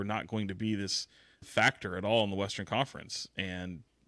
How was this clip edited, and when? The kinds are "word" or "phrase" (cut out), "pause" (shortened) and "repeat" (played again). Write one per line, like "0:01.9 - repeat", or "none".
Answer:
0:01.4 - word